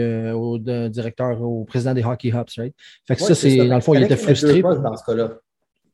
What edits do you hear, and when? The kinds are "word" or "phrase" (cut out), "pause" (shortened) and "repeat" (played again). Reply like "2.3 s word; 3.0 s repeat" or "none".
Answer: none